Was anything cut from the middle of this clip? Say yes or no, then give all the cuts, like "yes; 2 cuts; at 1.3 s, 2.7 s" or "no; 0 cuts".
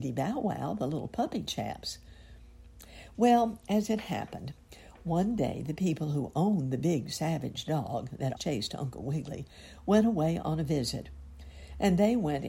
yes; 1 cut; at 8.4 s